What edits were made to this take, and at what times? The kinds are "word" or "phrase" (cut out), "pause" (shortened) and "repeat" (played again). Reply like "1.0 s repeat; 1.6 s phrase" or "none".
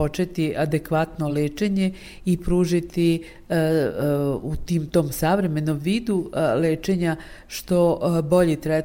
none